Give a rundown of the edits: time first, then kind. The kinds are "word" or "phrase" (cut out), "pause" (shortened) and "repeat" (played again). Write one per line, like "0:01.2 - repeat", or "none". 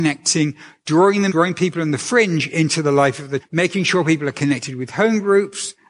0:01.3 - word
0:03.4 - word